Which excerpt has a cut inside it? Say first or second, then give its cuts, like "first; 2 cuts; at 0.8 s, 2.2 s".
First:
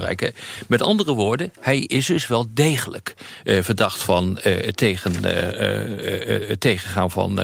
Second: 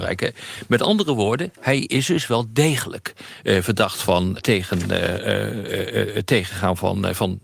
second; 1 cut; at 4.4 s